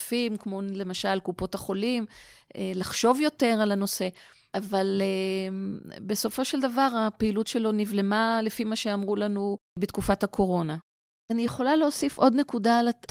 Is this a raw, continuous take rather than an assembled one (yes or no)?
yes